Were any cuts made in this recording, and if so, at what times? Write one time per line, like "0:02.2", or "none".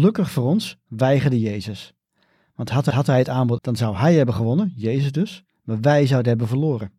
0:02.9
0:03.6